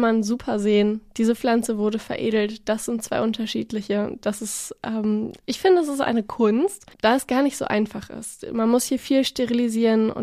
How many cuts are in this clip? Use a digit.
1